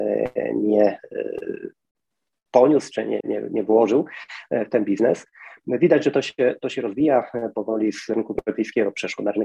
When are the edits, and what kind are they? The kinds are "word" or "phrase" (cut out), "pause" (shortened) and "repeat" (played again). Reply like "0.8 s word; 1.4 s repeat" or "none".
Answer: 3.2 s word